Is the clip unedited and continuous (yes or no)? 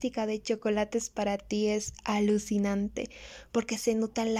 yes